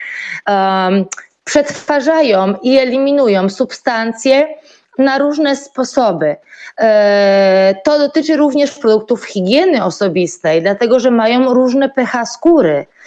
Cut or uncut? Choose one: uncut